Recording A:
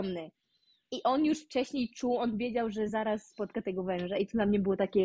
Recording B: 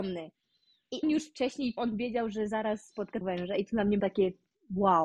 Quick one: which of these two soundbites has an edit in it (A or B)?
B